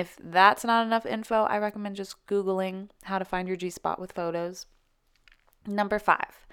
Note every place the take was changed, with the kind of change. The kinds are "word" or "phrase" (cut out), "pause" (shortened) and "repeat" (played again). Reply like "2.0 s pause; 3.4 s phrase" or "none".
none